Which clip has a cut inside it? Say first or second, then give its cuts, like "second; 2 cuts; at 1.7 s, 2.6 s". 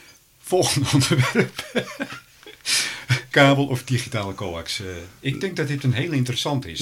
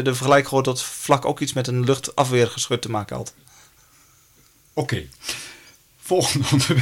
first; 1 cut; at 3.3 s